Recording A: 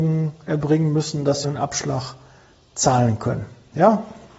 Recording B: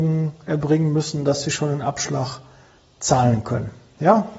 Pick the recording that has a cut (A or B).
A